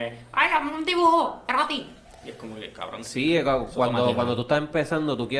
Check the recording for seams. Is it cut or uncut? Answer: uncut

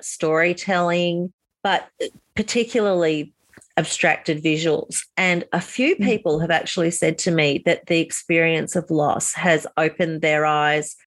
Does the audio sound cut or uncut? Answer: uncut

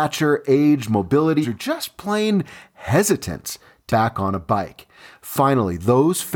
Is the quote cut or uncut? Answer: cut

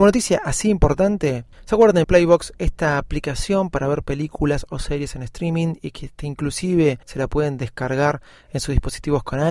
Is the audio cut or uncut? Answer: cut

